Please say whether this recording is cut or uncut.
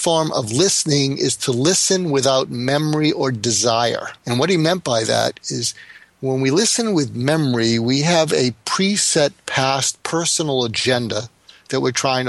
cut